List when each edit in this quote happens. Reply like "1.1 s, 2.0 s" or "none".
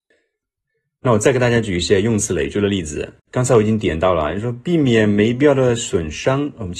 3.2 s